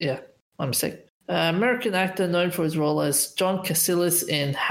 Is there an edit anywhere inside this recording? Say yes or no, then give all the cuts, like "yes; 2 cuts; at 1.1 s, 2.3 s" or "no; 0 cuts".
no; 0 cuts